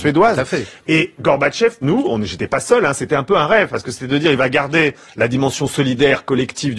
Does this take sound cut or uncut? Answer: cut